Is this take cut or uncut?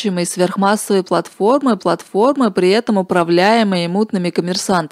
cut